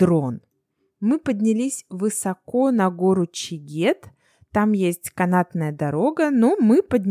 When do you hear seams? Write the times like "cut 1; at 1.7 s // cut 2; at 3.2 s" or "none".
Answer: none